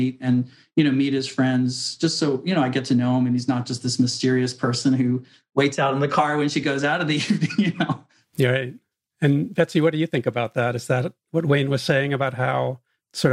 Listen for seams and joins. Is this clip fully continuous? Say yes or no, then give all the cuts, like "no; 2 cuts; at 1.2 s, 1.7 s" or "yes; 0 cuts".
yes; 0 cuts